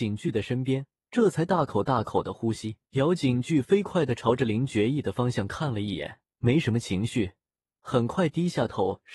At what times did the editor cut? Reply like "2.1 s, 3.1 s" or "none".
1.0 s, 2.9 s, 6.3 s